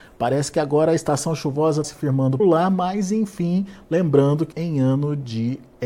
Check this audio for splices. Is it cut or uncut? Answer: cut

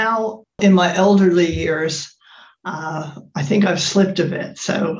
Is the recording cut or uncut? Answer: uncut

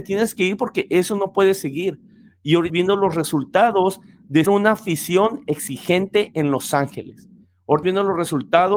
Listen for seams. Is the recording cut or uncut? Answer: cut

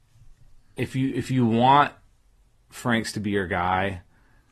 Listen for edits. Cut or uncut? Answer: uncut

